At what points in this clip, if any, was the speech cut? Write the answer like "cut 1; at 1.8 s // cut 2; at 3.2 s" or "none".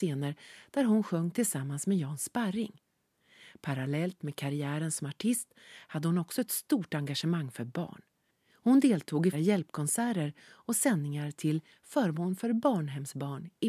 cut 1; at 9.3 s